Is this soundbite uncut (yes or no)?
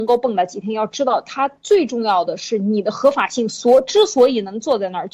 yes